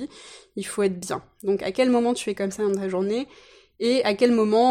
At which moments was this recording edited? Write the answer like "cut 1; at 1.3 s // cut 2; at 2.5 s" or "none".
none